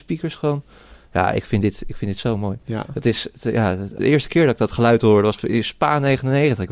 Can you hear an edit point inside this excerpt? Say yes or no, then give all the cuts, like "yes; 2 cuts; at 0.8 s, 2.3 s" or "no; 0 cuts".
yes; 1 cut; at 4.0 s